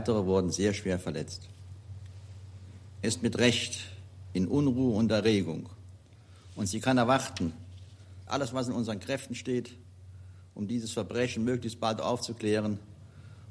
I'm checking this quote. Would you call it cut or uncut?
cut